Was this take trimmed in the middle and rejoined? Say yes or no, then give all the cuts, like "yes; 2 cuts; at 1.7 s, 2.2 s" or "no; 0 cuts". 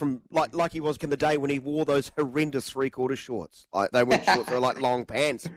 yes; 2 cuts; at 1.0 s, 3.9 s